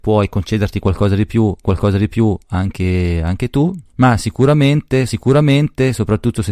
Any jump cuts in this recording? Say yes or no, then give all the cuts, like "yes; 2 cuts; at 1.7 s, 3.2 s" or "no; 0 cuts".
yes; 3 cuts; at 1.6 s, 3.9 s, 5.1 s